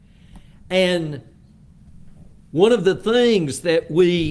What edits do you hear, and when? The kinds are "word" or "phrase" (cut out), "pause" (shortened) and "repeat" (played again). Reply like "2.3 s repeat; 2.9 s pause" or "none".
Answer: none